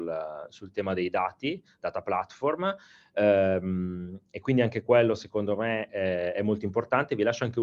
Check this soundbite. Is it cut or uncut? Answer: uncut